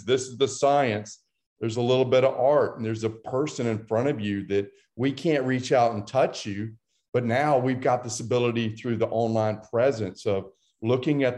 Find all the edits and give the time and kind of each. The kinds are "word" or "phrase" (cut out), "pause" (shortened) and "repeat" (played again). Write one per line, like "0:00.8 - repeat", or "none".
none